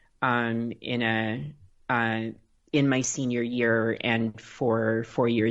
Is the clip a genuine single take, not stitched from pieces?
yes; 0 cuts

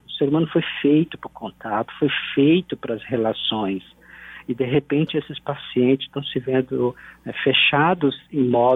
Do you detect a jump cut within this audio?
no; 0 cuts

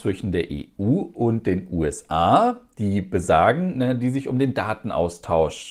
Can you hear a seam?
no; 0 cuts

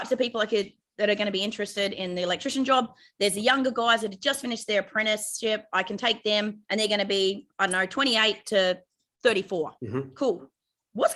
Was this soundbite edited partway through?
yes; 2 cuts; at 6.6 s, 9.8 s

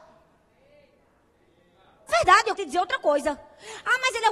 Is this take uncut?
no; 2 cuts; at 2.1 s, 2.6 s

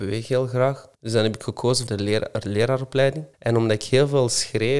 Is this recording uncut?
no; 3 cuts; at 0.9 s, 1.9 s, 3.3 s

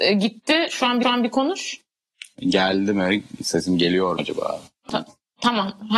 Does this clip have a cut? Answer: yes; 3 cuts; at 1.0 s, 4.2 s, 4.9 s

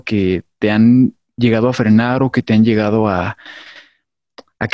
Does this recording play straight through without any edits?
yes; 0 cuts

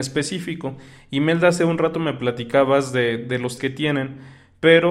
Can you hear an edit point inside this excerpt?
yes; 1 cut; at 3.6 s

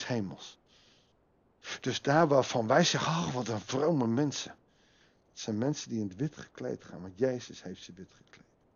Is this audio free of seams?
yes; 0 cuts

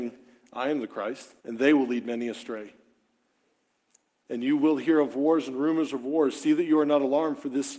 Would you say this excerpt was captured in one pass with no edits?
no; 1 cut; at 1.4 s

